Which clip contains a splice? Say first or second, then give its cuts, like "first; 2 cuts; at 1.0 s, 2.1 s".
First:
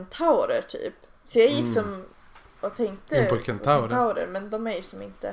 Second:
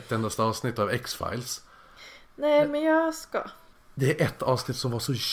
first; 1 cut; at 1.2 s